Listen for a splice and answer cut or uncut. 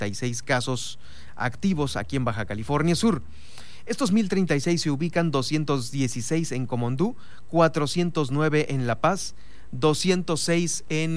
uncut